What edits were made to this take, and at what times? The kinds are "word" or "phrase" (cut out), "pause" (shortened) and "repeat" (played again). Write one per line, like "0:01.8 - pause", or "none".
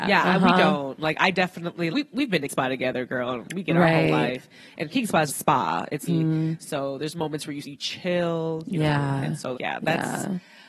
0:01.9 - word
0:02.5 - word
0:05.3 - word
0:06.1 - word
0:07.6 - word
0:09.5 - word